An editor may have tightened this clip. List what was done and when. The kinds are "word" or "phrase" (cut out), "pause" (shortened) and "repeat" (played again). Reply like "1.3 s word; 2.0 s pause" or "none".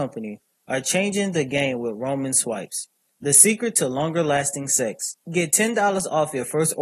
3.1 s pause; 5.2 s pause